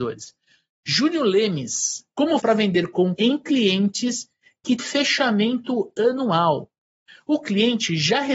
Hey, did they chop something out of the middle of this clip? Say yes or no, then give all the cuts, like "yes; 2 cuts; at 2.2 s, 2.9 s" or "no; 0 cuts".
yes; 3 cuts; at 2.4 s, 3.1 s, 4.8 s